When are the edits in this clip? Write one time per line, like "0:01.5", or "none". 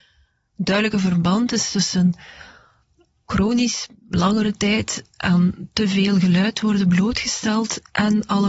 none